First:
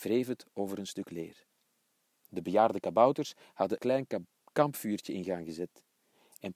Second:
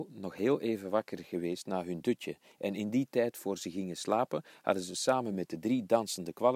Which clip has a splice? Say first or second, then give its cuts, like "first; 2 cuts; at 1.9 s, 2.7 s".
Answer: first; 1 cut; at 3.8 s